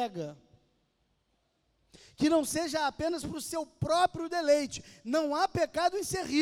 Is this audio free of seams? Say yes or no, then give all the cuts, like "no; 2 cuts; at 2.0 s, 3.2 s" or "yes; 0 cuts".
yes; 0 cuts